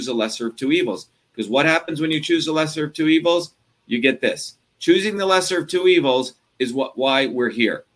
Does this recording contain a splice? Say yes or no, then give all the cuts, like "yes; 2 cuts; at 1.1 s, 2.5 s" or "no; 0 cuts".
no; 0 cuts